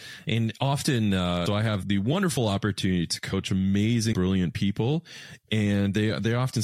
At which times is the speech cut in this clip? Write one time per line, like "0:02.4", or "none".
0:01.5
0:01.8
0:04.1